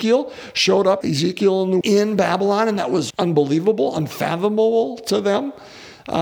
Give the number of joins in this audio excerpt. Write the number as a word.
three